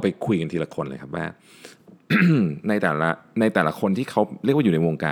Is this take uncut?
yes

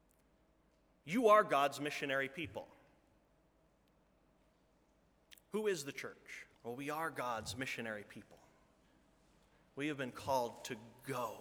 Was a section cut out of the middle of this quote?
yes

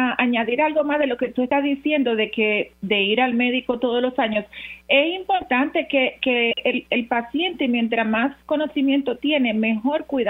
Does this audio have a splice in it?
no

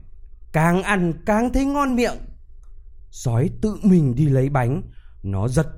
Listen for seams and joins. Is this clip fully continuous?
yes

